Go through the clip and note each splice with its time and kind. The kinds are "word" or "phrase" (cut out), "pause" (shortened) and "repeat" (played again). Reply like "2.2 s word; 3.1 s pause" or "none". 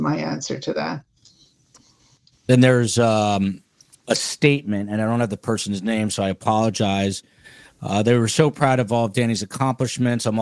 none